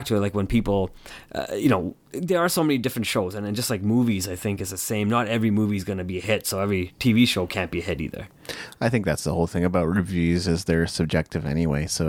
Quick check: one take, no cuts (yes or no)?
yes